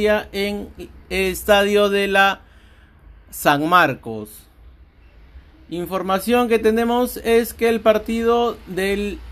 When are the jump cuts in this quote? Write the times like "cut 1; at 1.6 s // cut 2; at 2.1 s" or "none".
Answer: none